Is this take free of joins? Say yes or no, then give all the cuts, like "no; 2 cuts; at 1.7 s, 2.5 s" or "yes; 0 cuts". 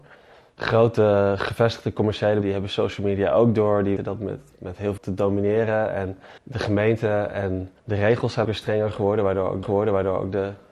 no; 7 cuts; at 2.4 s, 4.0 s, 5.0 s, 6.4 s, 7.8 s, 8.4 s, 9.6 s